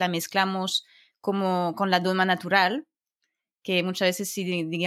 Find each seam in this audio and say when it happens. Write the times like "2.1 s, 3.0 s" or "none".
none